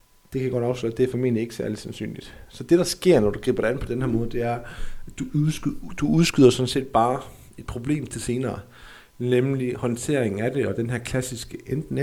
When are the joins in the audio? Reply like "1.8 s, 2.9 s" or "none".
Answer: none